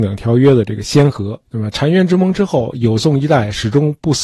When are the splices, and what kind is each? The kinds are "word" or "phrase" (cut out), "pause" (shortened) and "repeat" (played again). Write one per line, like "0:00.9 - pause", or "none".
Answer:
0:01.5 - pause